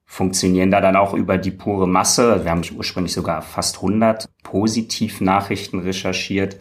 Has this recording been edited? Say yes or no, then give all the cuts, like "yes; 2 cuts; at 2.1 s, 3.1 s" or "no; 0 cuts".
yes; 1 cut; at 2.6 s